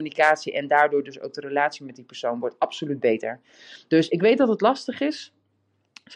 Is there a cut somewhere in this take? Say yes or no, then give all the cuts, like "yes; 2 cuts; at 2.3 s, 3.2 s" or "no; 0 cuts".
no; 0 cuts